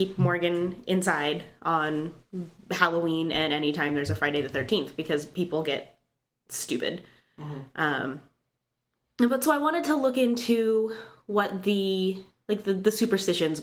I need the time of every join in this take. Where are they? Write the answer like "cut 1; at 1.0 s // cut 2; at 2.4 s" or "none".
none